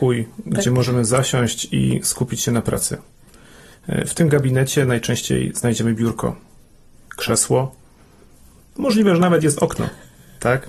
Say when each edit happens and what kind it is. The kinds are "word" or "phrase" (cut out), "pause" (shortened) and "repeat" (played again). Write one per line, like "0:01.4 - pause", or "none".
none